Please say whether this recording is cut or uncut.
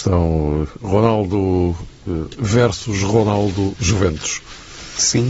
cut